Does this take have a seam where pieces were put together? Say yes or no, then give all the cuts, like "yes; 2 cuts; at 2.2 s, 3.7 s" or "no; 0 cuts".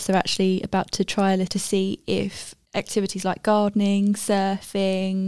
yes; 2 cuts; at 1.5 s, 2.7 s